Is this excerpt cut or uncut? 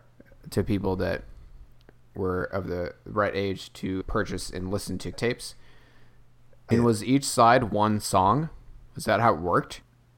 cut